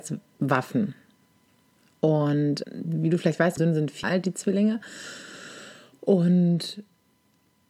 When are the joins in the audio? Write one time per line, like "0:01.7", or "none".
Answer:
0:02.6
0:03.6
0:04.0